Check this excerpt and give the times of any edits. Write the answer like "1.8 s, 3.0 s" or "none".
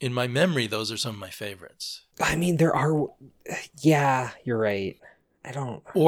2.1 s